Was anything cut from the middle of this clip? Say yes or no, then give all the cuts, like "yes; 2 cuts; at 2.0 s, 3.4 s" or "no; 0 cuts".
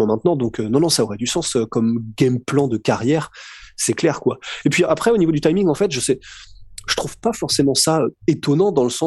no; 0 cuts